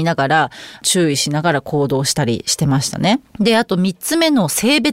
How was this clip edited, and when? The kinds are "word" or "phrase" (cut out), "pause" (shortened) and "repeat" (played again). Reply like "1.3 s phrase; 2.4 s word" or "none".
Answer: 3.3 s pause